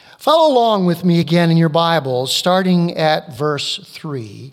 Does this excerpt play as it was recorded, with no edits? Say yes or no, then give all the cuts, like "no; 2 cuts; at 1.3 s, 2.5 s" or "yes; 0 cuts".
yes; 0 cuts